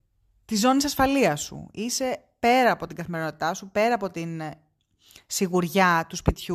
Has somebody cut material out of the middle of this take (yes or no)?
no